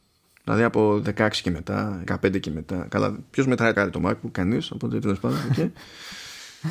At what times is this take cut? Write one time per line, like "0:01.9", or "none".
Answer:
0:02.1
0:03.7